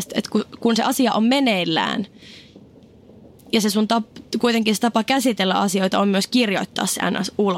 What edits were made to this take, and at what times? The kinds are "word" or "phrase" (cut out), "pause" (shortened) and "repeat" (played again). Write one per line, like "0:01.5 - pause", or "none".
none